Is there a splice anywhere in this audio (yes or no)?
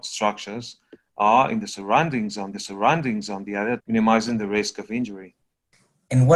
yes